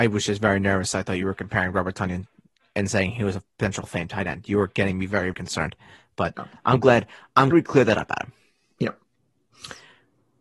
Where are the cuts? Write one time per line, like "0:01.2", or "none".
0:03.8
0:05.3
0:07.5